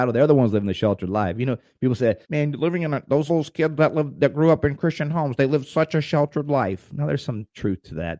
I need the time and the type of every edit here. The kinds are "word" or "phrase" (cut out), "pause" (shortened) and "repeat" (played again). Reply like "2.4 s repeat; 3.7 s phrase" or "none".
2.2 s pause; 3.3 s word